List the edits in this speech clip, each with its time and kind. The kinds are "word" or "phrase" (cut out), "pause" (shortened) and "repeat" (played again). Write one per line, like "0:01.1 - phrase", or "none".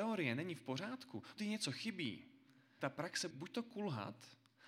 0:01.4 - word
0:02.8 - word
0:03.3 - word